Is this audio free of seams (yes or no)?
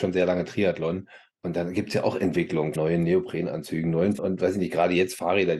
no